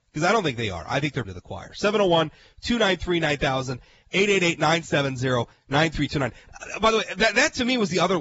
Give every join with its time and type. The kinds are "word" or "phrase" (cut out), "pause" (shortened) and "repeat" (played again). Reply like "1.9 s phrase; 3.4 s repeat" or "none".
1.2 s word